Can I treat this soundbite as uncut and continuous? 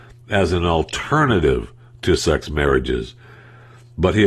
no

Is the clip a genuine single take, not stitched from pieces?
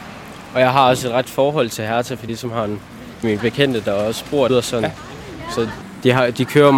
no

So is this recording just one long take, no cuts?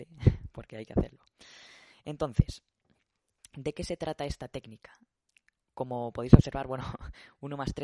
yes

